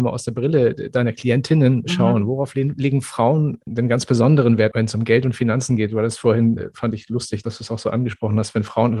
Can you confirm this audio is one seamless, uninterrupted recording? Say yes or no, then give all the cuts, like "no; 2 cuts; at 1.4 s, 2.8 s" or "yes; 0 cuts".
yes; 0 cuts